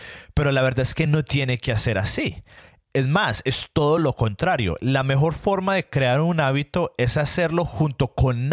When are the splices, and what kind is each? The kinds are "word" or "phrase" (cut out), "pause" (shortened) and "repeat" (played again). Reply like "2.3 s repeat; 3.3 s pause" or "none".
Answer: none